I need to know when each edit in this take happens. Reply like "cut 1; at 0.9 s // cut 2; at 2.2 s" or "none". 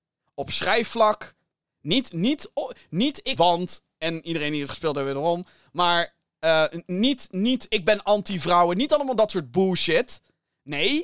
cut 1; at 3.3 s